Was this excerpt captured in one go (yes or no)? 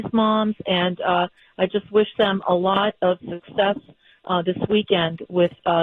yes